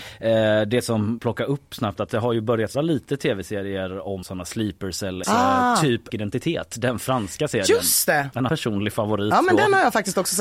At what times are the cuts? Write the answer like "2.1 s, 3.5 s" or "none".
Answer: 1.2 s, 2.7 s, 4.2 s, 5.2 s, 6.1 s, 8.5 s